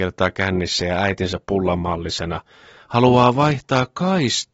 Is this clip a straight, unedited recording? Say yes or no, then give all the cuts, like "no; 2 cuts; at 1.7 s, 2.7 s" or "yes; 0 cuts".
yes; 0 cuts